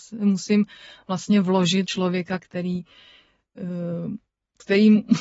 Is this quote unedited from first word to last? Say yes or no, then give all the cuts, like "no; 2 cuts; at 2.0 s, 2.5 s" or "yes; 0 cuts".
no; 1 cut; at 1.8 s